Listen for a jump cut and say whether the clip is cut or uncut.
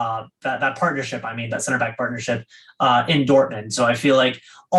uncut